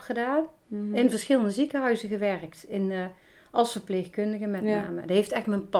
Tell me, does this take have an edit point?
no; 0 cuts

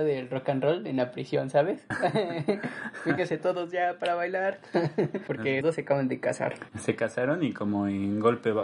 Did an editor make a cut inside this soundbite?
yes; 1 cut; at 5.6 s

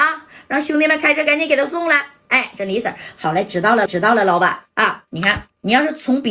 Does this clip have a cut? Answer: yes; 2 cuts; at 3.9 s, 5.1 s

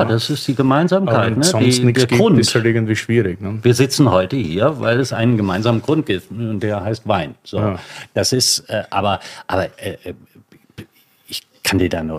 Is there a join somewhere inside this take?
yes; 1 cut; at 9.7 s

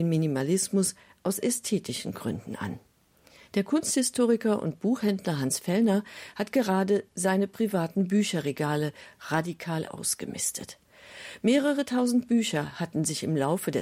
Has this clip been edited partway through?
no; 0 cuts

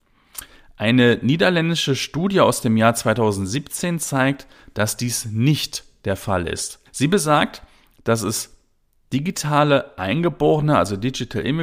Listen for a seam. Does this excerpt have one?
yes; 1 cut; at 6.9 s

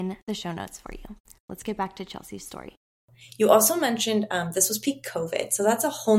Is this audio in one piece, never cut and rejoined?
yes; 0 cuts

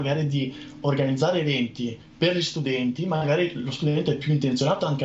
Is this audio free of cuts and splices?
yes; 0 cuts

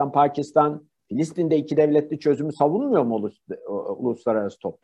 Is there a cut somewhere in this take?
yes; 1 cut; at 1.0 s

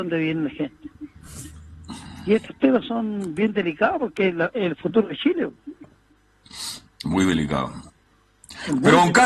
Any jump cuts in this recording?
no; 0 cuts

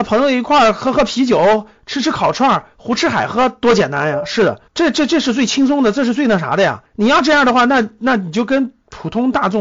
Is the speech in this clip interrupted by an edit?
yes; 2 cuts; at 4.7 s, 6.9 s

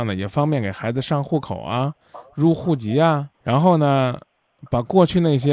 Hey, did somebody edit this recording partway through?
yes; 1 cut; at 3.3 s

